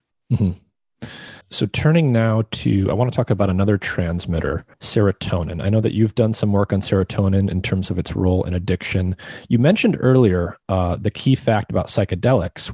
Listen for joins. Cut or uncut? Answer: cut